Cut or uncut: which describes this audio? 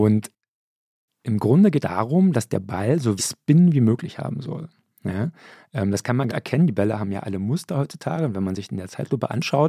cut